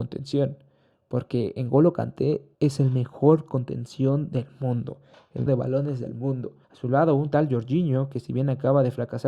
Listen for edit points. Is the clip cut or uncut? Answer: cut